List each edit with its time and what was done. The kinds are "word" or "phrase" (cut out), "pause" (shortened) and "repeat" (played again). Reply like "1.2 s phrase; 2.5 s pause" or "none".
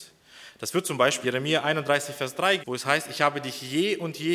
1.2 s word; 2.6 s word